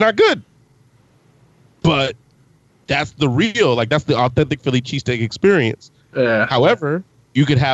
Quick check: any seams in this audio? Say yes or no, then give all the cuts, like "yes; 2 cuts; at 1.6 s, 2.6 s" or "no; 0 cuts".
no; 0 cuts